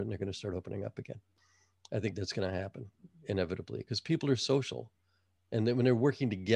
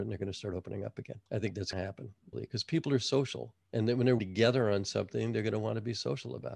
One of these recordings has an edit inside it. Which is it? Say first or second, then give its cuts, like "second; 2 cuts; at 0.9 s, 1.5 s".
second; 5 cuts; at 1.3 s, 1.7 s, 2.3 s, 3.7 s, 4.2 s